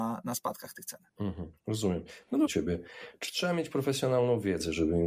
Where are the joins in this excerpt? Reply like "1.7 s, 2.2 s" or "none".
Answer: 1.1 s, 2.5 s